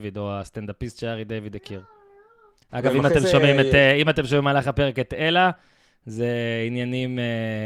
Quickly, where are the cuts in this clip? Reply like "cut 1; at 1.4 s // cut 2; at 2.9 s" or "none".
none